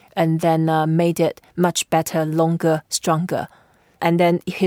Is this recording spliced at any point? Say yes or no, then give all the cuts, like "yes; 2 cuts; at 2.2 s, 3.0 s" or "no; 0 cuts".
no; 0 cuts